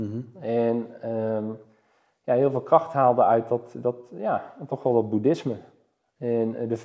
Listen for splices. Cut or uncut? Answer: uncut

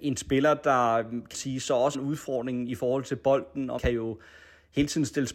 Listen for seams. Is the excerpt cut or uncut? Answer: cut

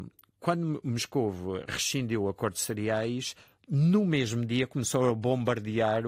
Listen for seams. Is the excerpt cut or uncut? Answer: uncut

